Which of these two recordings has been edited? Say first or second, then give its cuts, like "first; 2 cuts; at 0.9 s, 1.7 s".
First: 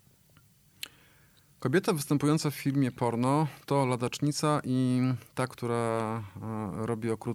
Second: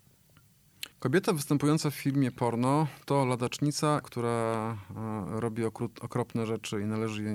second; 2 cuts; at 0.9 s, 4.0 s